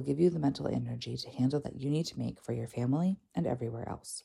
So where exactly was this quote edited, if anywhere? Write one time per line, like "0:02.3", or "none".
0:01.6